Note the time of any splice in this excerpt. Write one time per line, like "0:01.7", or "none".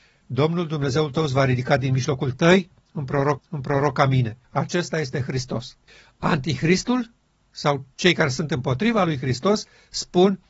0:02.3
0:03.4
0:04.4
0:05.9
0:07.9